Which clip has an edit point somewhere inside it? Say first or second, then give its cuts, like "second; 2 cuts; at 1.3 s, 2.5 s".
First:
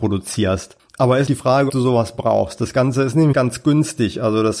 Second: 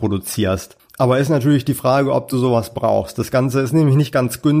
first; 3 cuts; at 1.3 s, 1.7 s, 3.3 s